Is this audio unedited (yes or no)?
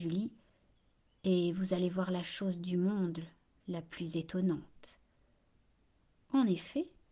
yes